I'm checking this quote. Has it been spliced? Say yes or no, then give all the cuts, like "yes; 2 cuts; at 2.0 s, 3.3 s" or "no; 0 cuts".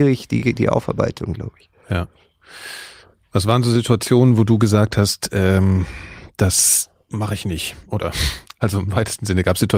no; 0 cuts